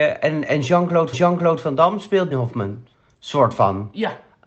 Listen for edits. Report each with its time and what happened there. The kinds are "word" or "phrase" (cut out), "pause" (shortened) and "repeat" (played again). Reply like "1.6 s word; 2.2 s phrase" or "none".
1.1 s repeat; 2.3 s word